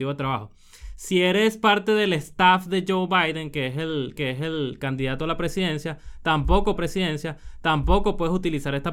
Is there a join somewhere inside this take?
yes; 2 cuts; at 4.2 s, 6.8 s

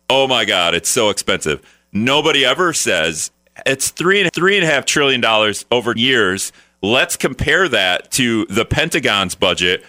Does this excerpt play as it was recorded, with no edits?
no; 2 cuts; at 4.3 s, 6.0 s

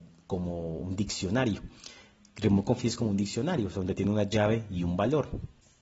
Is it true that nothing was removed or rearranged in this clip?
yes; 0 cuts

